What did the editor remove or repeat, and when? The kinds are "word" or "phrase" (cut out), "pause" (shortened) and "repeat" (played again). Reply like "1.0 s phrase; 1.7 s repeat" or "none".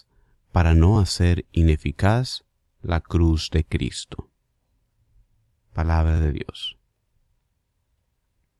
none